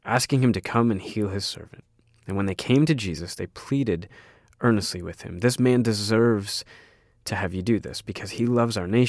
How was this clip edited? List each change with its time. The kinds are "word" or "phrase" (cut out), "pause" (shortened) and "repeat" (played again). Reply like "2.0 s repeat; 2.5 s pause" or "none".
none